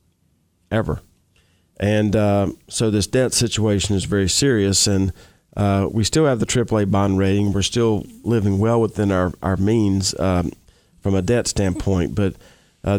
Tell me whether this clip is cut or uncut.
uncut